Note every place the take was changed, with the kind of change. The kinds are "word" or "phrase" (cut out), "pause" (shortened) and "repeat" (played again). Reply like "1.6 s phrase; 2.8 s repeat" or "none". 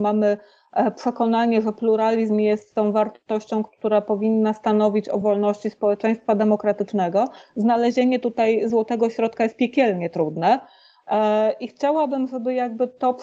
none